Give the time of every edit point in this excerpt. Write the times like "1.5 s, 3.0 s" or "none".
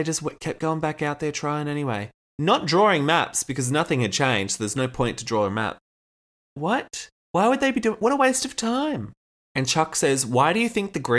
7.2 s, 9.2 s

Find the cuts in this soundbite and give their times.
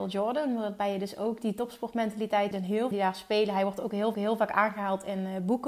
2.5 s, 2.9 s, 4.1 s

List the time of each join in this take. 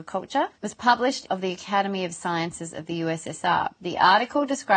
1.3 s

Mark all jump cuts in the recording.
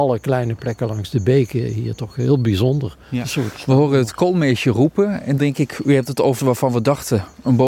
5.4 s, 6.4 s

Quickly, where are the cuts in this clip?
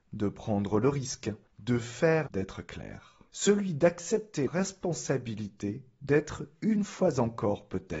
1.5 s, 2.3 s, 3.3 s, 4.5 s

